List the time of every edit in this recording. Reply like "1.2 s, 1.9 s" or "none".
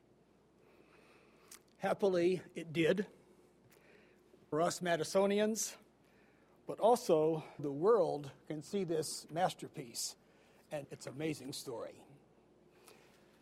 4.5 s, 7.6 s, 10.8 s